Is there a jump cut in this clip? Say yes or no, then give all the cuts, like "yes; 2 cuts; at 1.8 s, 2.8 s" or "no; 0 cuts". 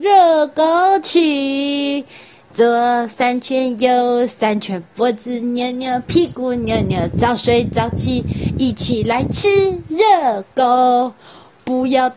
no; 0 cuts